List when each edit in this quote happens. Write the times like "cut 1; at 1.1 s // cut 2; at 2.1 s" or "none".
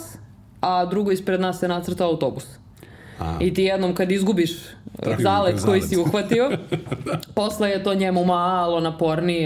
cut 1; at 5.2 s